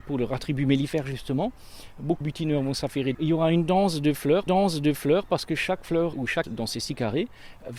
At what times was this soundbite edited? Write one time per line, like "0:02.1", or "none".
0:02.2
0:03.1
0:04.5
0:06.1
0:06.4